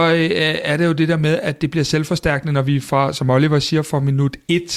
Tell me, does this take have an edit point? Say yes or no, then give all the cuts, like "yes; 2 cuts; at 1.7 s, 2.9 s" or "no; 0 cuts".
no; 0 cuts